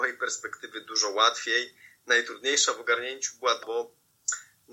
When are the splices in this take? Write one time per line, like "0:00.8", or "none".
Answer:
0:03.6